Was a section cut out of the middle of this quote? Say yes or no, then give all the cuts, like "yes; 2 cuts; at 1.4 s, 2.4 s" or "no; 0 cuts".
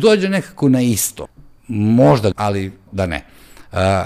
yes; 2 cuts; at 2.3 s, 2.9 s